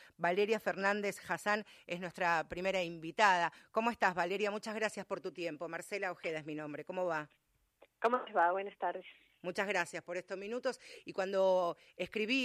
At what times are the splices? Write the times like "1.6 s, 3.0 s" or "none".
none